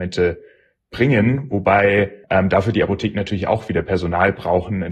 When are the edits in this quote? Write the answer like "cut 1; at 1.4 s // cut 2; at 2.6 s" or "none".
cut 1; at 2.2 s